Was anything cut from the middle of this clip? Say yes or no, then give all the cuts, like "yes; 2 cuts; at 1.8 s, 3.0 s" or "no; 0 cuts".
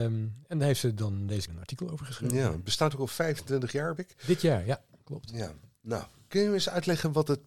yes; 2 cuts; at 1.5 s, 4.0 s